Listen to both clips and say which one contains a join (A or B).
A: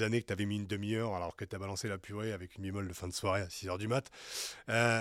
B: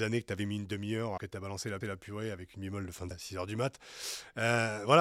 B